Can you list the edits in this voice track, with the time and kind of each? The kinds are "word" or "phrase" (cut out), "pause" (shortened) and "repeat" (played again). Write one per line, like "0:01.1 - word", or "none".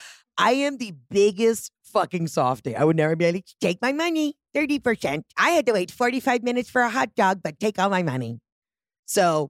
0:05.3 - pause